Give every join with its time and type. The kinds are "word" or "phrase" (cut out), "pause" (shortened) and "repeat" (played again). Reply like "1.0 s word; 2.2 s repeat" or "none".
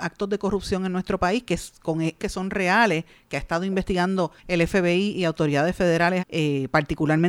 2.2 s word; 4.4 s pause; 6.2 s word